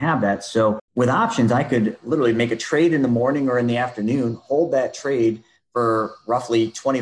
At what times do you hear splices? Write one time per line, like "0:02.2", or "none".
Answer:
none